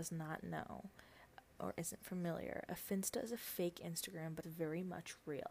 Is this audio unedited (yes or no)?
no